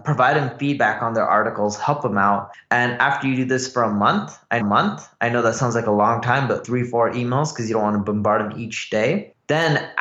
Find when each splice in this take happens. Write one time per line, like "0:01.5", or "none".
0:04.6
0:06.6